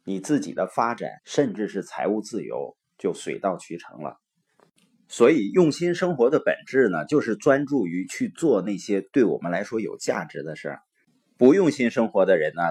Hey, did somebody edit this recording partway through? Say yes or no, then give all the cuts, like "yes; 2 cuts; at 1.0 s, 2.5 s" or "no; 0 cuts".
yes; 1 cut; at 1.2 s